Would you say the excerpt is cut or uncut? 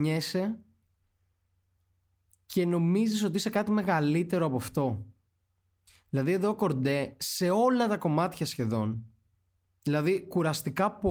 uncut